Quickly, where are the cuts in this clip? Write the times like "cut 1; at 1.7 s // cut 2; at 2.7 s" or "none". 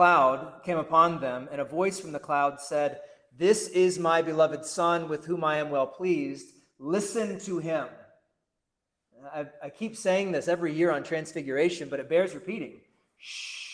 none